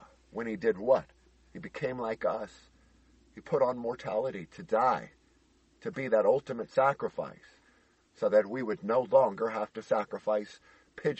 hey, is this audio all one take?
yes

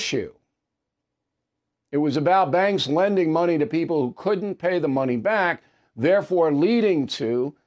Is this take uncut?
yes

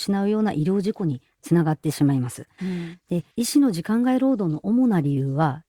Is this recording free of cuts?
no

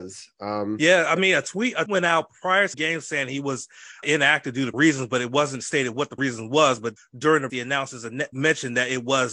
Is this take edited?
yes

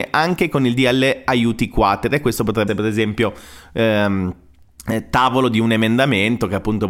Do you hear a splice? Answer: yes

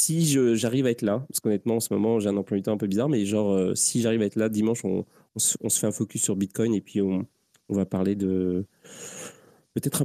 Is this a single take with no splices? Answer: yes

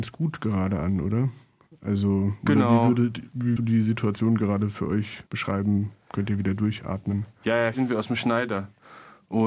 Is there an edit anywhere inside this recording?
yes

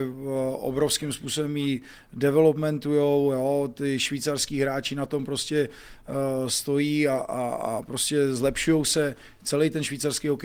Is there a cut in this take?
no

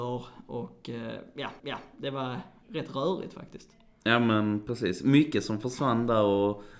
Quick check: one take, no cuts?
no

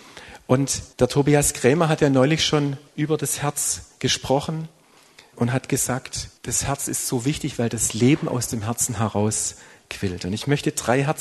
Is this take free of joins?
no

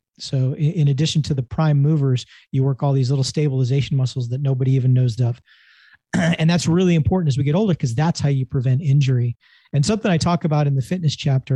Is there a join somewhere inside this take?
yes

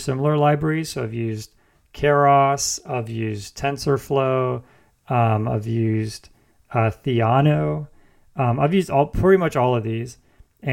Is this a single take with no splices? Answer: yes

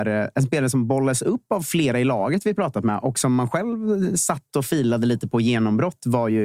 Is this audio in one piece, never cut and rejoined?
yes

